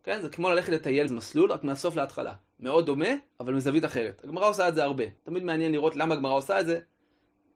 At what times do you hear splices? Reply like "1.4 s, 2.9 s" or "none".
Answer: 1.1 s, 3.3 s, 5.2 s